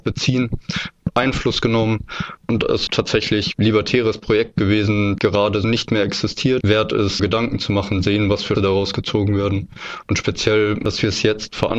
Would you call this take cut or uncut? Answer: cut